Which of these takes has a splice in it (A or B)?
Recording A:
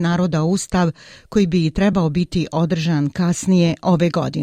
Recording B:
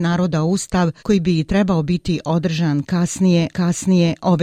B